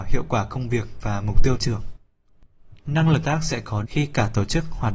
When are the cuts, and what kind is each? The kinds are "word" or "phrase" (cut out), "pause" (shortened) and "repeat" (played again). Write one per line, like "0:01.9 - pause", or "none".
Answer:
0:01.6 - word
0:03.2 - word
0:03.8 - word